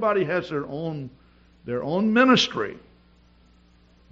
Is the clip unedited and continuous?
yes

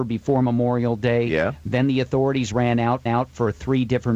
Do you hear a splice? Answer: yes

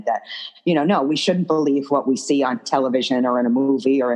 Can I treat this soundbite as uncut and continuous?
yes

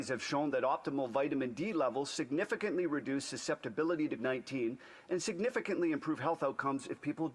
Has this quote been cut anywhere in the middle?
yes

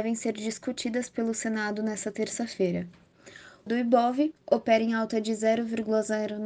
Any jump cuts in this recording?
yes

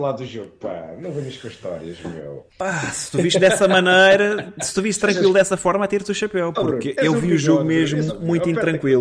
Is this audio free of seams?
no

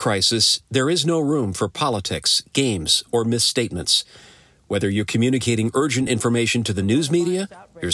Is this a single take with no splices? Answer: yes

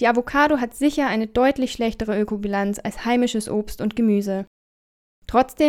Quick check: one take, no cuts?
yes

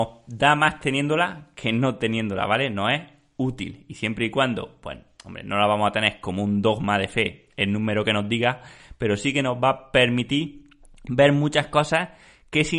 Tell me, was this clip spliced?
no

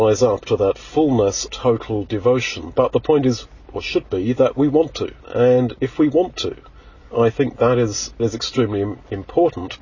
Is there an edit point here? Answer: yes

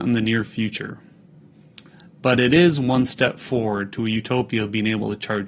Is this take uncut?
yes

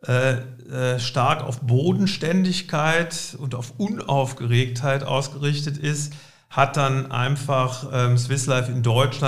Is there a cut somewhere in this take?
no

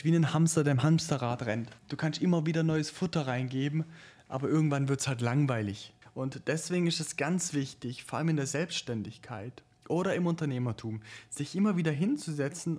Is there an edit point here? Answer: yes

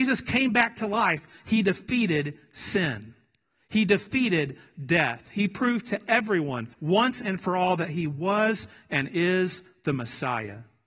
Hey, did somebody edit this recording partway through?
yes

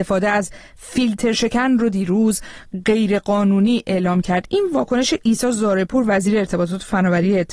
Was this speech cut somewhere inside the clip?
no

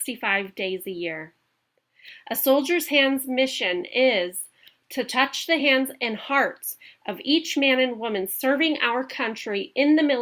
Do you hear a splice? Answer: no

